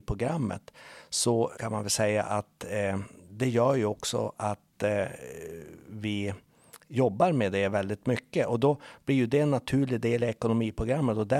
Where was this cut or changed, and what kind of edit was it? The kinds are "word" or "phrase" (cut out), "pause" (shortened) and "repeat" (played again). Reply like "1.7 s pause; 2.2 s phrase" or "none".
1.6 s word